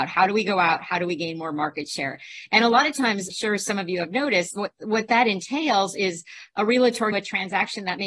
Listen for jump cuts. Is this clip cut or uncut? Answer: cut